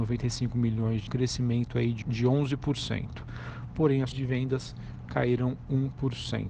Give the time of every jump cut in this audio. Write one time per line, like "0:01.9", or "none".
0:01.1
0:02.0
0:04.1